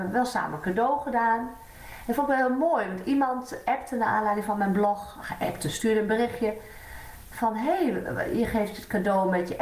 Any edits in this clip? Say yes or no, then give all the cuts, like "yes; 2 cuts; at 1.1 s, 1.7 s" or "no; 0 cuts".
no; 0 cuts